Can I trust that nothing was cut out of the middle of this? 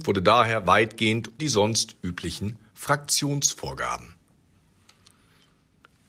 no; 1 cut; at 1.4 s

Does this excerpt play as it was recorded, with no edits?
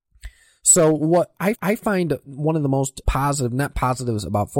no; 2 cuts; at 1.5 s, 3.0 s

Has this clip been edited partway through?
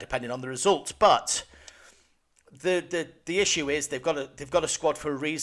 no; 0 cuts

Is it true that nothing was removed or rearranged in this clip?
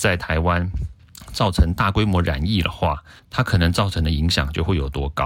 no; 1 cut; at 3.2 s

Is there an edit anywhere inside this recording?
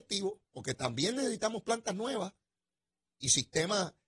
no; 0 cuts

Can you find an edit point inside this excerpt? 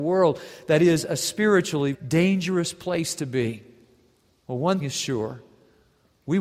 yes; 2 cuts; at 1.9 s, 4.8 s

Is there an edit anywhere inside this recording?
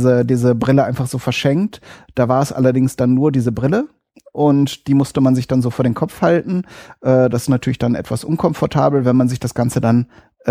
no; 0 cuts

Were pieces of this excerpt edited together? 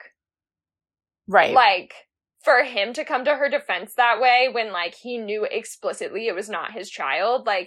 no; 0 cuts

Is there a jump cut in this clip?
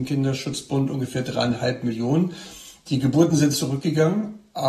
no; 0 cuts

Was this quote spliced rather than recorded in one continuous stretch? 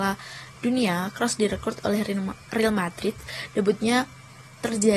no; 0 cuts

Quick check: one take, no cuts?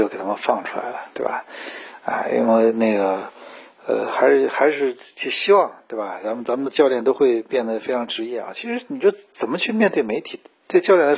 yes; 0 cuts

